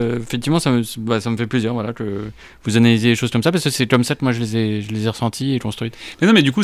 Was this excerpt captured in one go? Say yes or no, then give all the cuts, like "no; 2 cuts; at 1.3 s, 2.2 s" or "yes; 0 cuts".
yes; 0 cuts